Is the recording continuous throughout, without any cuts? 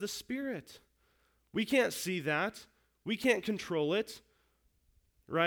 yes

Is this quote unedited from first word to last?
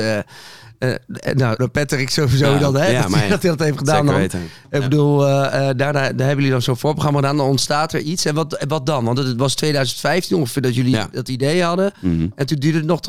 no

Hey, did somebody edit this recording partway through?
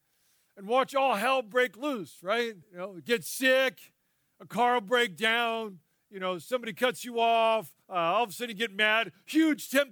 yes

